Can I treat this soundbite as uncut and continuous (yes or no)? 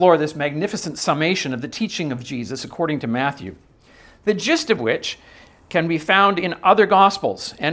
yes